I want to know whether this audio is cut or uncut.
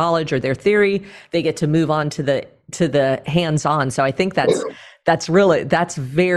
uncut